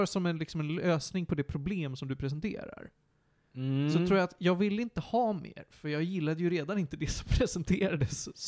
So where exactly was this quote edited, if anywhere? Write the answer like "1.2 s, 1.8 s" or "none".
none

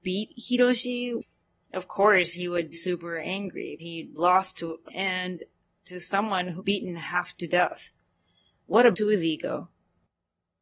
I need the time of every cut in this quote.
2.7 s, 3.8 s, 4.2 s, 4.9 s, 6.6 s, 8.9 s

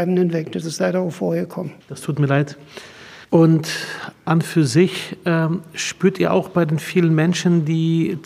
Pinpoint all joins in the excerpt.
1.8 s, 3.2 s

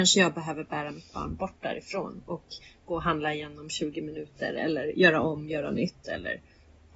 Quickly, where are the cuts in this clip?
none

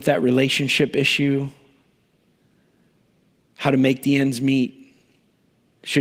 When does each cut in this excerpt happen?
none

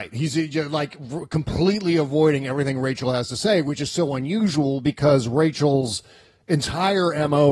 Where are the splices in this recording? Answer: none

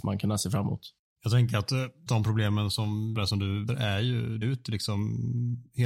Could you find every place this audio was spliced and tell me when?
2.1 s, 3.2 s, 3.7 s, 4.4 s

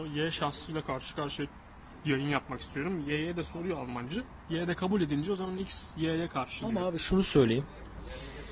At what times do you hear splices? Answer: none

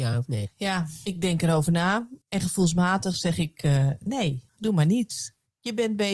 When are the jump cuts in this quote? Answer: 2.2 s, 4.5 s

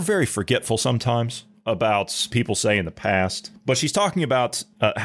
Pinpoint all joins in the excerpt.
2.3 s

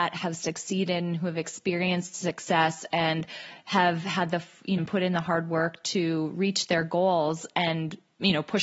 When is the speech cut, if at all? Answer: 4.8 s

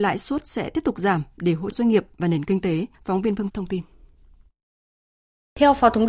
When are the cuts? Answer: 1.7 s, 2.9 s, 3.5 s

